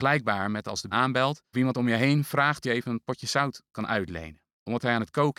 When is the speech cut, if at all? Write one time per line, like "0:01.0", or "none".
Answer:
0:00.9
0:01.5
0:02.6